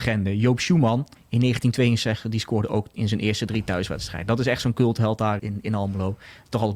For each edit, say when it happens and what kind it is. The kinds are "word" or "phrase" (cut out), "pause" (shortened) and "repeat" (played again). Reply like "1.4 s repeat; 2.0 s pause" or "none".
1.2 s pause; 5.4 s word